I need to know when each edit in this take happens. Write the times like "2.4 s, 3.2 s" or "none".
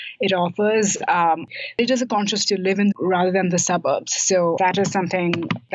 2.4 s, 2.9 s, 4.6 s